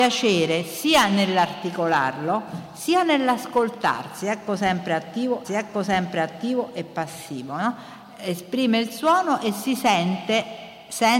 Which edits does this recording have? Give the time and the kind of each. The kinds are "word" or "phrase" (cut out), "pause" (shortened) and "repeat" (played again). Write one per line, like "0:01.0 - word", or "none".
0:05.4 - repeat